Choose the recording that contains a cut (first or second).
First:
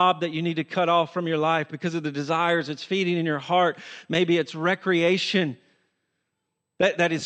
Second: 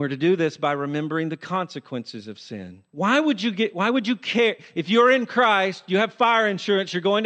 second